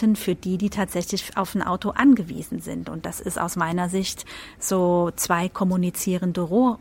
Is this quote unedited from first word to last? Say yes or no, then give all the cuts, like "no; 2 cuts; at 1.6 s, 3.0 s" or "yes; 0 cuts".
yes; 0 cuts